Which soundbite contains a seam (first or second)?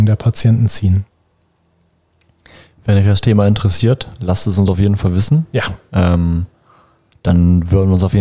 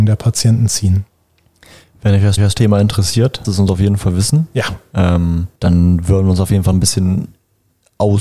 second